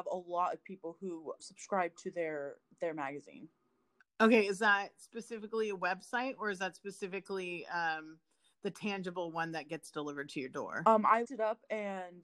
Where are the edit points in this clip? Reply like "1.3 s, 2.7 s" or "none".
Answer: 1.4 s, 11.2 s